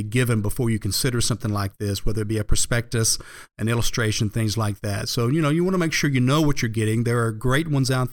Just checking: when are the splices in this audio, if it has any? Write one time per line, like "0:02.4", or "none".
none